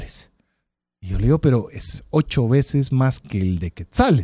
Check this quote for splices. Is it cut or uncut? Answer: cut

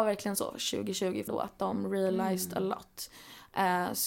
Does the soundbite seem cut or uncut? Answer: cut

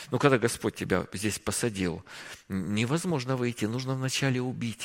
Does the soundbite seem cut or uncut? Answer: uncut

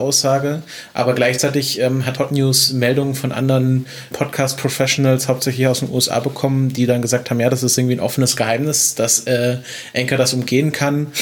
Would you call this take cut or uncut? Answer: cut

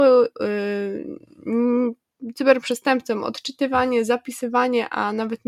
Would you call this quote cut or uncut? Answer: uncut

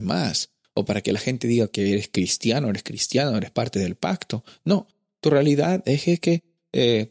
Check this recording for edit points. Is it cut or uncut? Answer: uncut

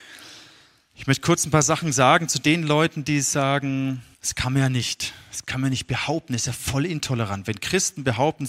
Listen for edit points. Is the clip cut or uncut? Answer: cut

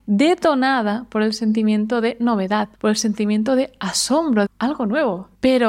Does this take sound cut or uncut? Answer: cut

